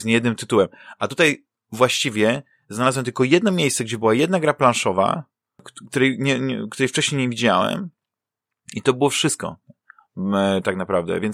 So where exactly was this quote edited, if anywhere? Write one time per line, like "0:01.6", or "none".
none